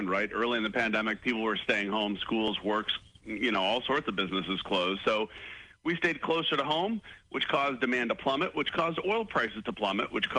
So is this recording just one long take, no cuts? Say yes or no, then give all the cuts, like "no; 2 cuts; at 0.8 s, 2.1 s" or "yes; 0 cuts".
yes; 0 cuts